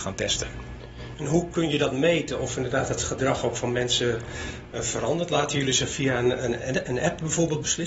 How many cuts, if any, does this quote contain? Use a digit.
0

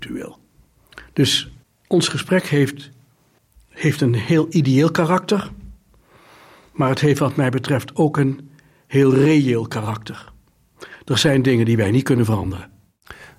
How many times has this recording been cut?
0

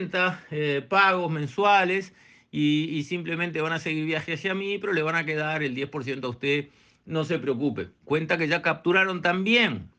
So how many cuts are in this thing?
0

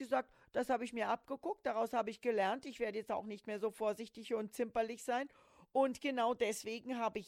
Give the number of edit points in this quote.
0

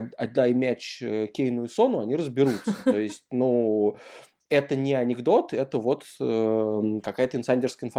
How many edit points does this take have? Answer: 0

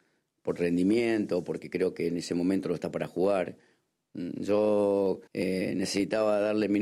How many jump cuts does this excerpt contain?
1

